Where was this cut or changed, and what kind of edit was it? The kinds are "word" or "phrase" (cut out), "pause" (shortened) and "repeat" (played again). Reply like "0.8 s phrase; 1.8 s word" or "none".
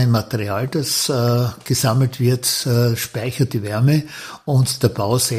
none